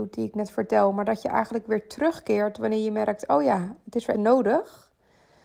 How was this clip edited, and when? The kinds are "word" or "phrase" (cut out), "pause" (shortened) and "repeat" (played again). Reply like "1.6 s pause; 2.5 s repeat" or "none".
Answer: 4.1 s word

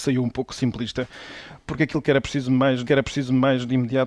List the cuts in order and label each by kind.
2.9 s repeat

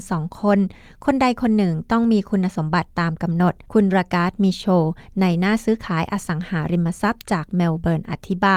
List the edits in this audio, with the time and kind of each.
3.6 s pause

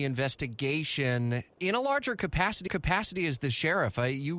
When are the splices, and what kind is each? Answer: 1.5 s word; 2.7 s repeat

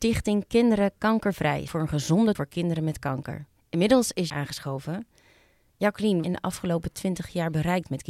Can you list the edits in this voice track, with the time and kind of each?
1.7 s phrase; 2.3 s word; 3.6 s pause; 4.3 s phrase; 6.2 s phrase

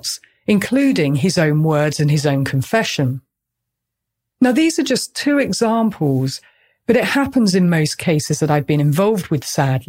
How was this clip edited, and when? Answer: none

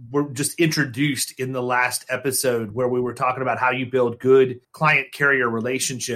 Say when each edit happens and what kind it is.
4.6 s pause

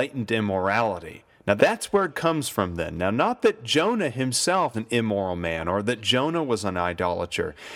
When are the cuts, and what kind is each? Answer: 1.6 s word; 2.1 s word; 4.7 s word

